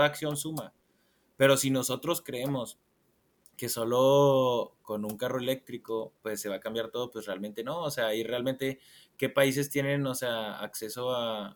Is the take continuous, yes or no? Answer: no